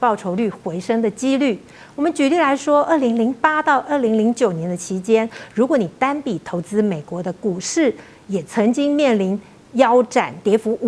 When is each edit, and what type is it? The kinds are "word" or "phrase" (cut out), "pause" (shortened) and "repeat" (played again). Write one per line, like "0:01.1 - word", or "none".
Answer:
none